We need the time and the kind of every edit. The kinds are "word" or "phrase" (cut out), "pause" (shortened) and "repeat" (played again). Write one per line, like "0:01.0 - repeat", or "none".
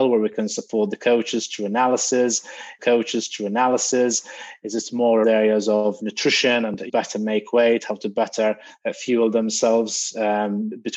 0:02.8 - repeat
0:05.2 - word
0:06.9 - phrase